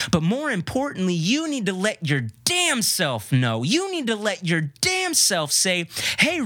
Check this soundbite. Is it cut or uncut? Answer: uncut